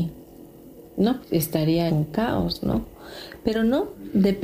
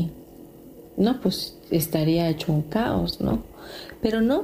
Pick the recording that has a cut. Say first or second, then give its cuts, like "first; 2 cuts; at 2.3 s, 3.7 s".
first; 2 cuts; at 1.2 s, 1.9 s